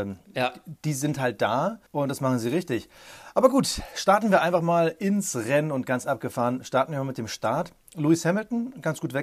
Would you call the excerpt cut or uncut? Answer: cut